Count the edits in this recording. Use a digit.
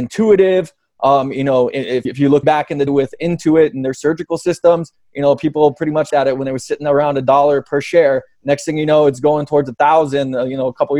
4